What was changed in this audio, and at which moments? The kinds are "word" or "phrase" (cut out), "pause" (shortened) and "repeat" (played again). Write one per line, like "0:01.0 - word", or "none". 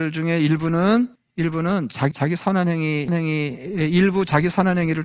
0:01.2 - pause
0:02.1 - word
0:03.1 - repeat